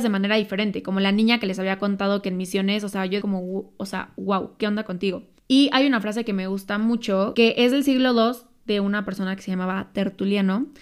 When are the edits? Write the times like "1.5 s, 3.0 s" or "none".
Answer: 3.2 s, 5.4 s